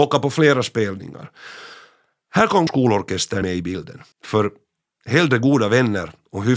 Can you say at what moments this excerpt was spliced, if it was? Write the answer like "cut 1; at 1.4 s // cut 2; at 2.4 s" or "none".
cut 1; at 2.7 s // cut 2; at 3.4 s // cut 3; at 4.1 s